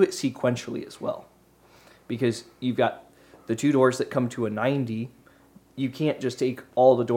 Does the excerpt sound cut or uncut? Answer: uncut